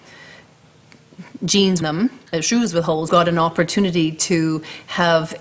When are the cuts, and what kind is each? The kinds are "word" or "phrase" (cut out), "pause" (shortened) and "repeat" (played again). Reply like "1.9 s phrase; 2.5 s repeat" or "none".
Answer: 1.8 s phrase; 2.3 s pause; 3.1 s phrase